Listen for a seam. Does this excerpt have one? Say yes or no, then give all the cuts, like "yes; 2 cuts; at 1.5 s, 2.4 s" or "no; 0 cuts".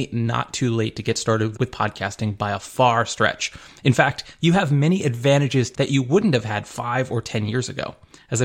yes; 2 cuts; at 1.5 s, 5.7 s